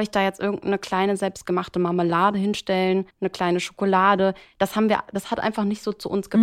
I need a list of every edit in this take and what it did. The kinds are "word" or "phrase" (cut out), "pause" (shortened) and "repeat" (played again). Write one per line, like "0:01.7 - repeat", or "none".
0:03.1 - pause